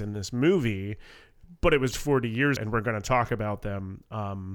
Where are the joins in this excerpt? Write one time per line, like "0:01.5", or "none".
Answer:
0:01.9
0:02.6